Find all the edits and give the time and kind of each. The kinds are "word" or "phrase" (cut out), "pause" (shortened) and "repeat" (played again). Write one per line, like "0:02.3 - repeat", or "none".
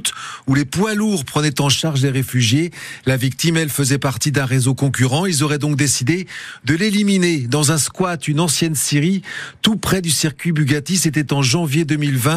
none